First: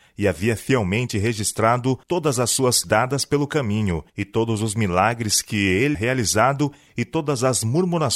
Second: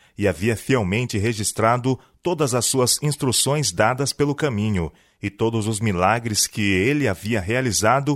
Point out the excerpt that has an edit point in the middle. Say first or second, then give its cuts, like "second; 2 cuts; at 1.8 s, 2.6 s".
first; 4 cuts; at 2.0 s, 2.8 s, 4.1 s, 5.9 s